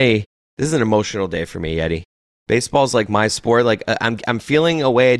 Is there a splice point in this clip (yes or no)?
no